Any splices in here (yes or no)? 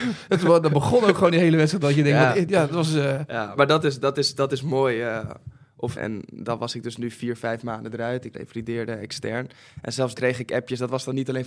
yes